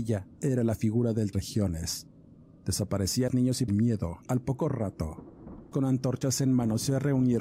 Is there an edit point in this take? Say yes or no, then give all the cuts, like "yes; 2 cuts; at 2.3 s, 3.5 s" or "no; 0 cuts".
yes; 5 cuts; at 1.3 s, 3.3 s, 3.7 s, 4.2 s, 5.7 s